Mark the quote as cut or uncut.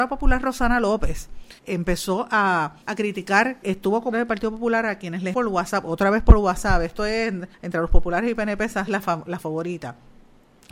cut